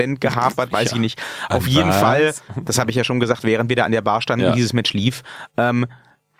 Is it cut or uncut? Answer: uncut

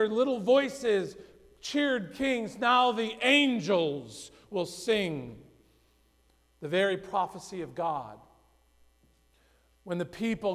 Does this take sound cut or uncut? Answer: uncut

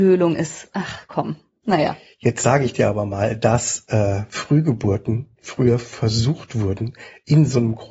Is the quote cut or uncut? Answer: uncut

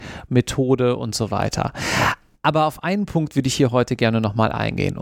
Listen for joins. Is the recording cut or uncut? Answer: uncut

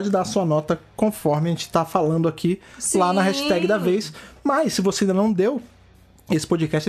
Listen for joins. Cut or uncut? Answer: uncut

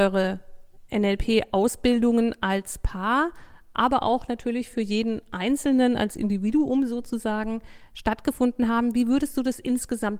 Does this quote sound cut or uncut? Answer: uncut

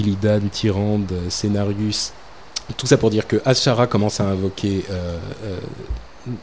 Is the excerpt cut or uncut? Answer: uncut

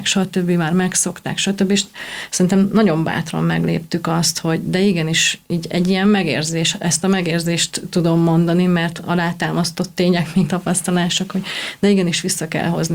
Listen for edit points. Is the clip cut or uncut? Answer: cut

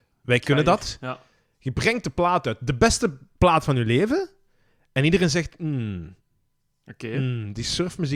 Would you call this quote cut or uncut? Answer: uncut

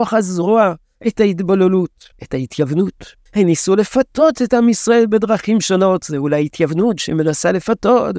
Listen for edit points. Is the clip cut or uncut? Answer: cut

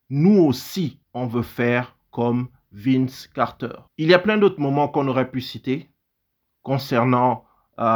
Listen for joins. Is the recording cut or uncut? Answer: cut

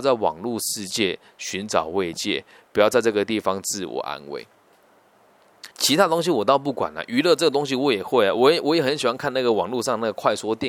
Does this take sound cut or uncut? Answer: cut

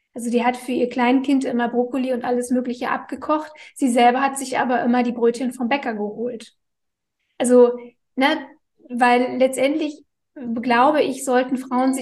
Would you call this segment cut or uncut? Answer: uncut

